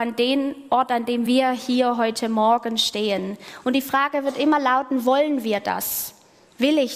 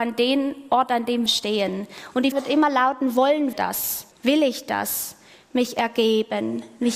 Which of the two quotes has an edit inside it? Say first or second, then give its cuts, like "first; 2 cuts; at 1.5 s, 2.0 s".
second; 4 cuts; at 1.3 s, 2.3 s, 3.5 s, 4.1 s